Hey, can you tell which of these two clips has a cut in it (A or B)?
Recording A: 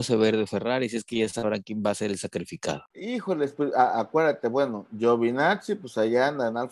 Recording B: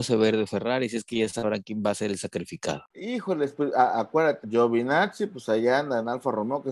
B